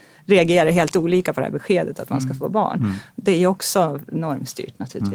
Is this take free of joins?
yes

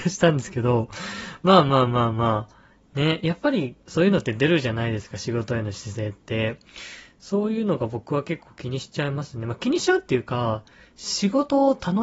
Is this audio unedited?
yes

